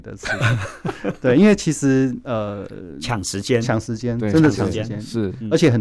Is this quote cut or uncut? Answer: uncut